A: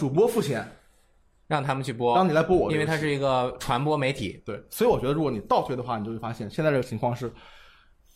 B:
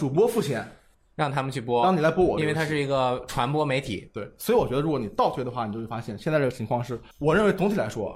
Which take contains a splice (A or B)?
B